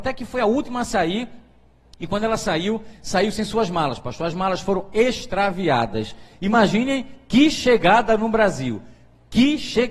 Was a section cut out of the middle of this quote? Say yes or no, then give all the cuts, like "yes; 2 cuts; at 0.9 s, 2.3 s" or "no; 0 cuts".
no; 0 cuts